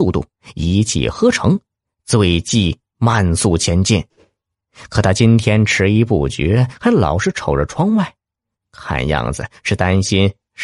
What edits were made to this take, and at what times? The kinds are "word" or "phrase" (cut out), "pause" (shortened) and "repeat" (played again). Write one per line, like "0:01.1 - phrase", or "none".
none